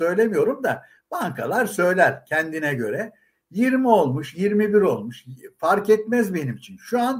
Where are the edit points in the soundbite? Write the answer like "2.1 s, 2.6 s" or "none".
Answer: none

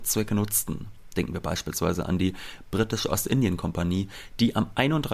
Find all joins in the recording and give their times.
none

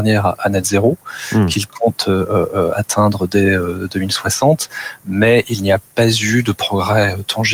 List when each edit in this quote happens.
none

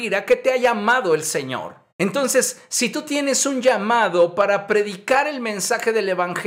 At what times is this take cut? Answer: 1.9 s

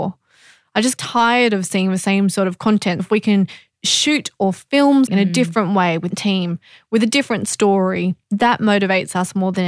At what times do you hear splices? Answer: 1.0 s, 3.0 s, 5.1 s, 6.1 s

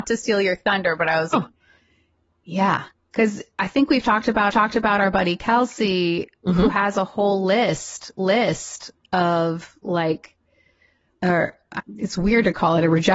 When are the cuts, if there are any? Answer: 1.3 s, 2.9 s, 4.5 s, 8.2 s, 11.1 s, 11.8 s

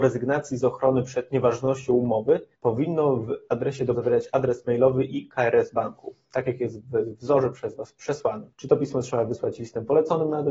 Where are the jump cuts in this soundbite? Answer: 2.5 s, 3.9 s, 8.5 s

